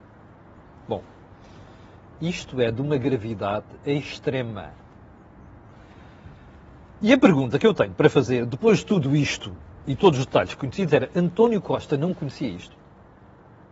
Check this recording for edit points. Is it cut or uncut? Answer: uncut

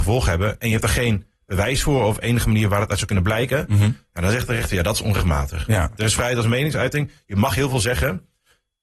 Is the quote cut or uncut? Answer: uncut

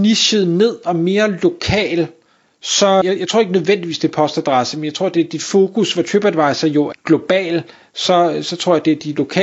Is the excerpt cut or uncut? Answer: cut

